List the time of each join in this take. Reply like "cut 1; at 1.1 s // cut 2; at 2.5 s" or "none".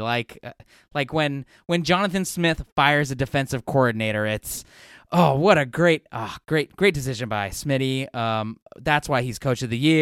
none